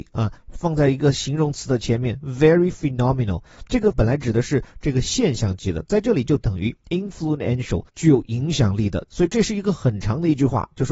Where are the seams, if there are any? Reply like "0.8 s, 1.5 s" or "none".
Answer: 3.9 s, 7.9 s